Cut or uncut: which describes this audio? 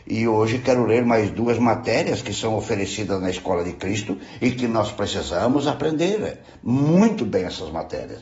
uncut